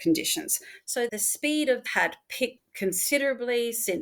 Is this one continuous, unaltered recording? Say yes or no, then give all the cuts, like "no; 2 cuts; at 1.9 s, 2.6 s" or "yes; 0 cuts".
no; 3 cuts; at 1.1 s, 1.9 s, 2.6 s